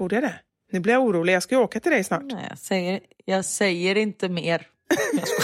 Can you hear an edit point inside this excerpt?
no; 0 cuts

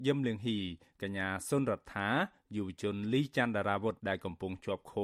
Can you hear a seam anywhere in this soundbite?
yes; 1 cut; at 4.0 s

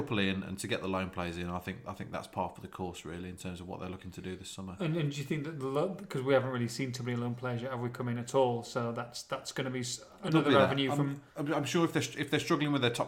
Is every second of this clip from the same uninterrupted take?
no; 1 cut; at 11.3 s

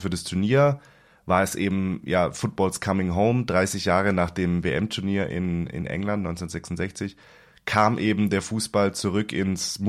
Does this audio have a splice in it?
no; 0 cuts

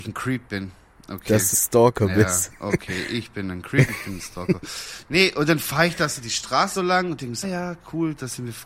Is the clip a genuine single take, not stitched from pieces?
no; 3 cuts; at 1.5 s, 6.7 s, 7.4 s

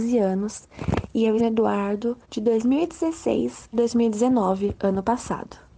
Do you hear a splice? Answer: yes; 3 cuts; at 1.4 s, 2.2 s, 3.7 s

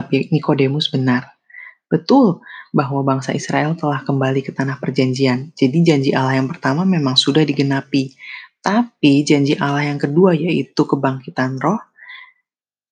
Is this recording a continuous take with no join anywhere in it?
yes; 0 cuts

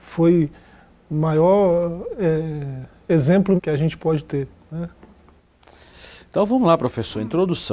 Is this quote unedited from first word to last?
no; 1 cut; at 3.6 s

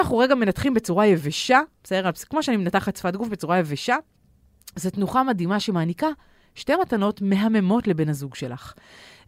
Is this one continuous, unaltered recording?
yes; 0 cuts

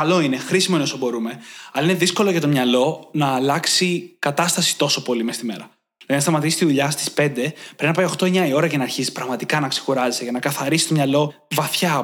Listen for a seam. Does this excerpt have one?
no; 0 cuts

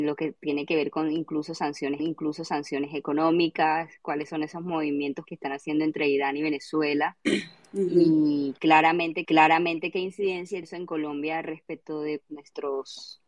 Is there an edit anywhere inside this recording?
yes; 5 cuts; at 2.0 s, 5.3 s, 9.2 s, 10.6 s, 12.3 s

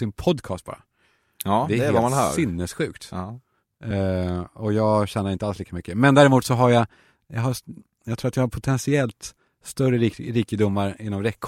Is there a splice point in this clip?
no; 0 cuts

